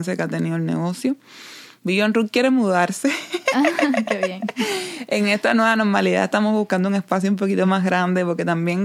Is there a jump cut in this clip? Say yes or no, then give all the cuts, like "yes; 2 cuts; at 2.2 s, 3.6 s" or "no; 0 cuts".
no; 0 cuts